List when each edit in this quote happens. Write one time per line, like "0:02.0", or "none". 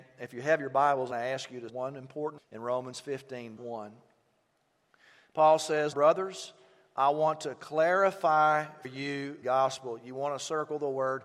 0:01.1
0:01.7
0:02.4
0:03.6
0:05.9
0:08.8
0:09.4

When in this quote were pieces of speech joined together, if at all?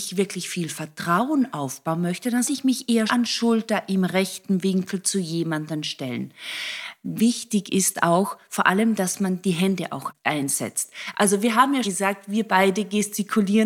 0:02.5
0:03.1
0:11.8

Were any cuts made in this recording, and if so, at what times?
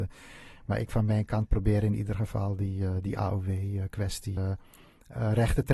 0:04.4

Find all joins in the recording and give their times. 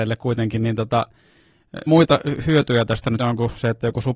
0:01.9
0:03.2

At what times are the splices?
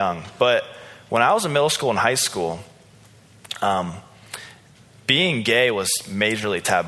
none

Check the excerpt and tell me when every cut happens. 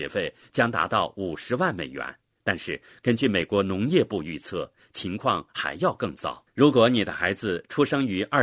0:02.3
0:06.5

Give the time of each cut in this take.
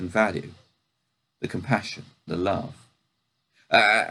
0:02.3

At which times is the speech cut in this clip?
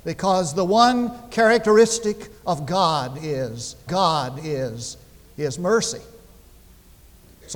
0:03.9

